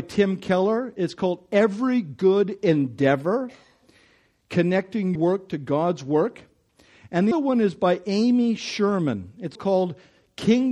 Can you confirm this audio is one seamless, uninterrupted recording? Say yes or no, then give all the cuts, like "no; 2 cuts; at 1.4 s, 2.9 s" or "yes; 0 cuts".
no; 3 cuts; at 5.2 s, 7.3 s, 9.6 s